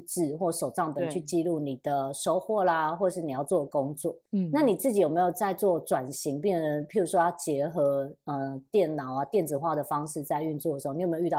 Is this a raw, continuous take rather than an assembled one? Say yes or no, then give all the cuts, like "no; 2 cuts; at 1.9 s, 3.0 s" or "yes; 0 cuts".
no; 1 cut; at 4.3 s